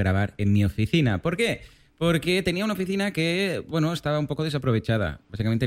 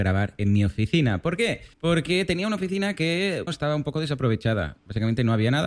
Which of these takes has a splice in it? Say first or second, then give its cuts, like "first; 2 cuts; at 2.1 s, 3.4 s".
second; 2 cuts; at 1.7 s, 3.5 s